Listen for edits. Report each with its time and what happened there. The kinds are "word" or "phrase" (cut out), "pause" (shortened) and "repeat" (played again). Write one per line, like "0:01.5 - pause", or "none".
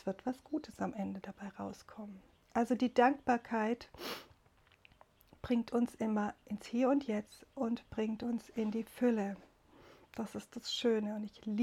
none